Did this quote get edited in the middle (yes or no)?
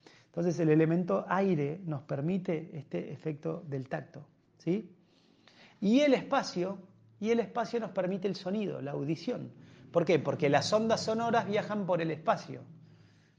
no